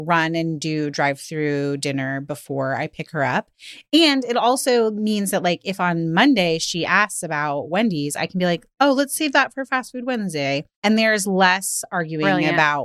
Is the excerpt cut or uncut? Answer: cut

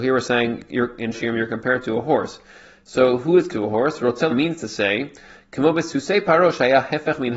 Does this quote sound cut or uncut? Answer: cut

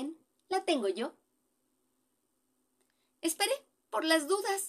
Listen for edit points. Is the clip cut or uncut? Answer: uncut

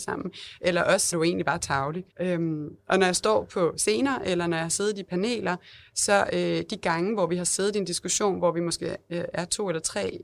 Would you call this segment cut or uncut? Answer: cut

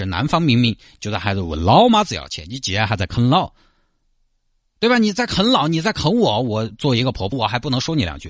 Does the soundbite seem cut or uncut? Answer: cut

